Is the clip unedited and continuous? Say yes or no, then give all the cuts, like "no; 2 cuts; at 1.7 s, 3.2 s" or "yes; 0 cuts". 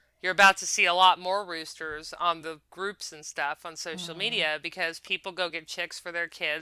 yes; 0 cuts